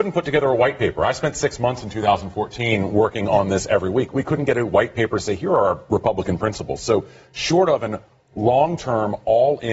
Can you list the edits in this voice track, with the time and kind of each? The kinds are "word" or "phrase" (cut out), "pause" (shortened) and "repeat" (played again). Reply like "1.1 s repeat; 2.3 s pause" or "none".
none